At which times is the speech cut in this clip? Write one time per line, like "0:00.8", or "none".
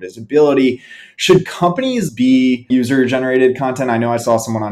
0:02.1
0:02.7